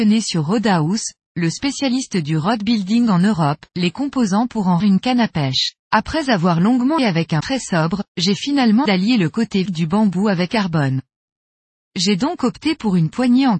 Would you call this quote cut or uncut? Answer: cut